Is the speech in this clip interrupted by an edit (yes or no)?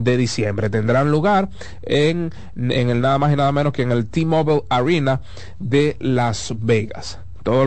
no